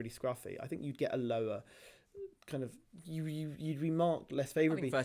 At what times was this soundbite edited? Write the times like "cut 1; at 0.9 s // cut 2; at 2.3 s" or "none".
none

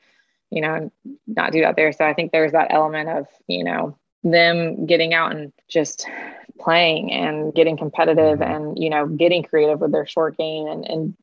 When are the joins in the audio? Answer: cut 1; at 5.6 s

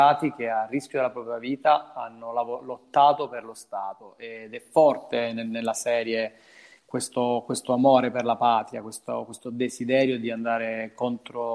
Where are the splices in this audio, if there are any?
none

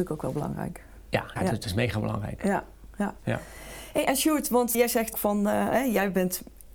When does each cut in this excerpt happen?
cut 1; at 1.4 s // cut 2; at 4.7 s // cut 3; at 5.1 s

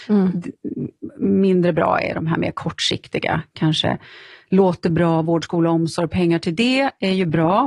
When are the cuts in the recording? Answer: none

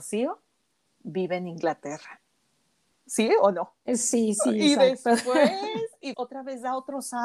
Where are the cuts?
cut 1; at 6.1 s

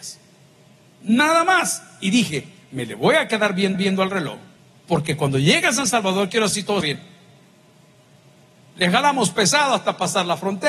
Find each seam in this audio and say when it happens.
cut 1; at 3.7 s // cut 2; at 4.6 s // cut 3; at 6.5 s // cut 4; at 6.8 s

